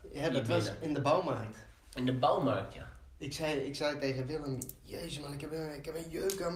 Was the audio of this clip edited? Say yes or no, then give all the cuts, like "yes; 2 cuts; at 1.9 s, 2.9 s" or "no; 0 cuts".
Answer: yes; 1 cut; at 1.8 s